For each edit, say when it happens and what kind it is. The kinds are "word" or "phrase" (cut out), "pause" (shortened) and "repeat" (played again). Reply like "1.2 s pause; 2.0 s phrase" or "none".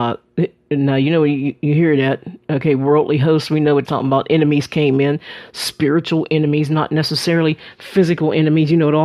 3.8 s word